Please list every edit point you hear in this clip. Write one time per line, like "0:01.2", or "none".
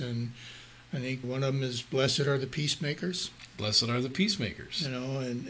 0:01.2